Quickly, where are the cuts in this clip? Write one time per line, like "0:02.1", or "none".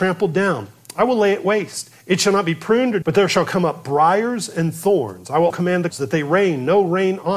0:03.0
0:05.5
0:05.9